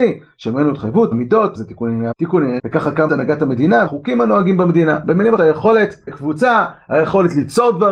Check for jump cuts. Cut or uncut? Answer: cut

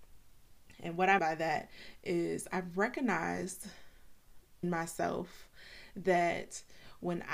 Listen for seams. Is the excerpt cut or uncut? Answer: cut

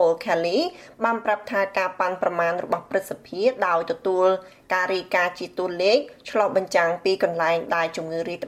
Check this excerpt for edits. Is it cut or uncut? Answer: uncut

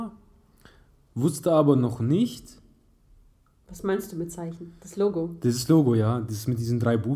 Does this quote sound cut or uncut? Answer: uncut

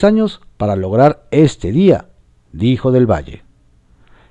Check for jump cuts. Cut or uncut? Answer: uncut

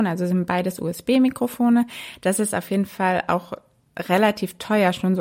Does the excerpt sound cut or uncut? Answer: uncut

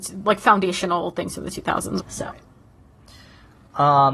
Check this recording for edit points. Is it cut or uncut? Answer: cut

